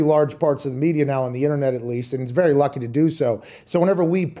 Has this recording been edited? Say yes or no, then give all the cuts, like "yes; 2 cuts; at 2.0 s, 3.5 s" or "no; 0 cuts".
no; 0 cuts